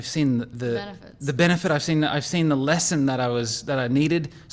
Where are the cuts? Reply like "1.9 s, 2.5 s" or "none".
none

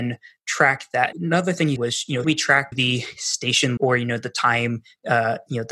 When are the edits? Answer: 1.1 s, 1.8 s, 2.2 s, 2.7 s, 3.8 s

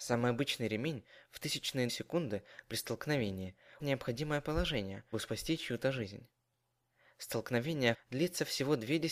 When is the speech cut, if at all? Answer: 1.9 s, 3.8 s, 5.1 s, 7.9 s

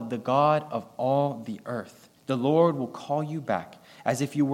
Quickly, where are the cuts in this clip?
2.2 s

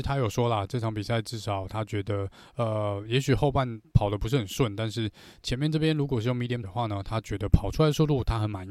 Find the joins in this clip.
3.8 s, 6.6 s

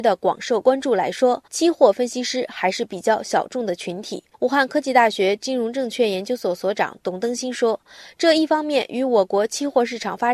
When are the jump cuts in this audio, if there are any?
1.5 s, 4.3 s

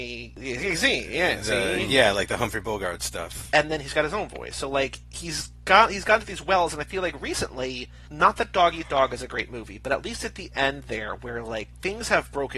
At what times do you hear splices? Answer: none

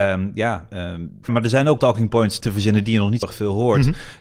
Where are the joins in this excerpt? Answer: 1.3 s, 1.8 s, 2.4 s, 3.2 s

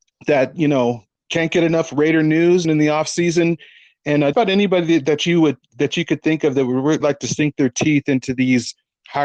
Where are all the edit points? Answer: 2.6 s, 4.3 s, 7.0 s

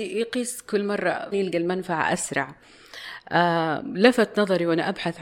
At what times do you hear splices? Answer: 1.3 s

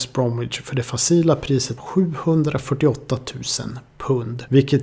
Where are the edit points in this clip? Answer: 1.8 s

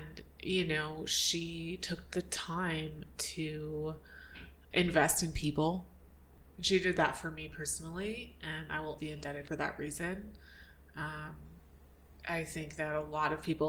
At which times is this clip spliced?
4.6 s, 9.0 s, 9.5 s

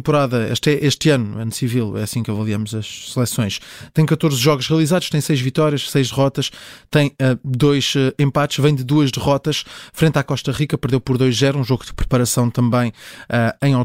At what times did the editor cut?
none

